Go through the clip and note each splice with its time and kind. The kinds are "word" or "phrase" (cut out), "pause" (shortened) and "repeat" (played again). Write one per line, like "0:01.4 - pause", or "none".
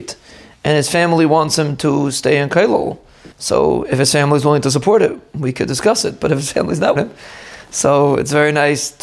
0:03.3 - pause
0:07.0 - phrase